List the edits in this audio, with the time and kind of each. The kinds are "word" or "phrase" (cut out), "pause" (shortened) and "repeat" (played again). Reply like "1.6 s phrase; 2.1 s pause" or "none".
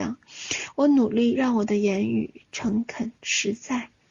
3.2 s pause